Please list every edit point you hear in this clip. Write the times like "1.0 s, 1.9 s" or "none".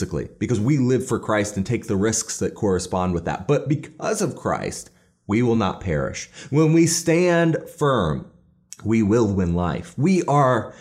none